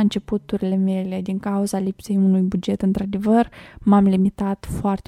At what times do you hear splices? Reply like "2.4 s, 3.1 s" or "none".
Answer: none

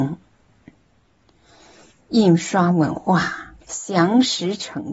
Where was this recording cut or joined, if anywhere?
3.6 s

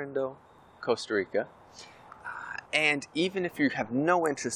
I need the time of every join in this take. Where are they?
2.7 s

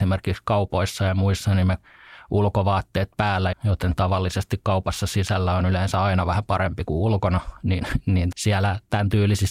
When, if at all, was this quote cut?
1.8 s, 3.5 s, 8.3 s

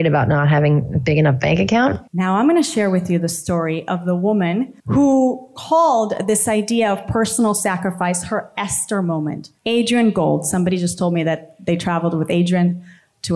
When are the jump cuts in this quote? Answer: 2.1 s, 4.8 s, 9.6 s

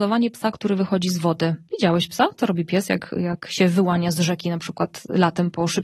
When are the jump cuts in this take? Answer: 1.7 s

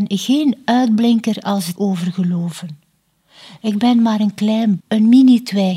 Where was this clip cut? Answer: 1.8 s, 4.8 s

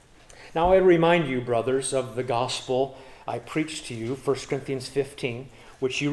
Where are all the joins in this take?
none

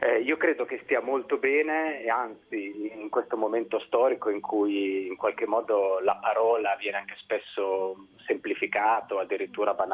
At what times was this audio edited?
none

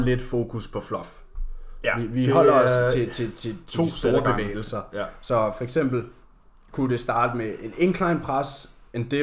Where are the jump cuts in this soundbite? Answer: none

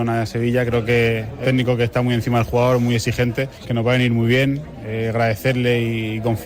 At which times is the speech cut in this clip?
1.4 s, 3.6 s

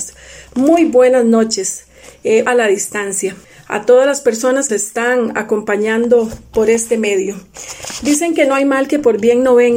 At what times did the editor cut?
2.5 s, 3.4 s, 4.7 s

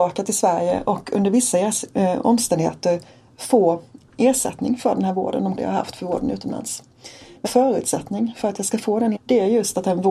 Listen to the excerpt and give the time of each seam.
5.6 s, 7.5 s, 9.2 s

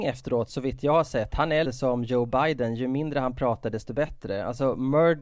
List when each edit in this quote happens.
1.6 s

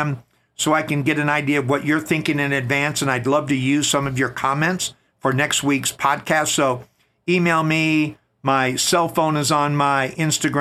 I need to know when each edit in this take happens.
none

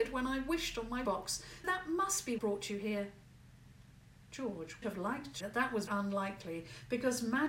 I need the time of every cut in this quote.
1.0 s, 1.6 s, 2.4 s, 4.8 s, 5.4 s, 5.9 s

